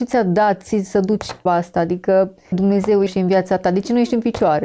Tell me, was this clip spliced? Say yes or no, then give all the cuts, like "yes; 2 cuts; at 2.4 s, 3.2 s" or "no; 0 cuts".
yes; 3 cuts; at 1.5 s, 2.5 s, 3.1 s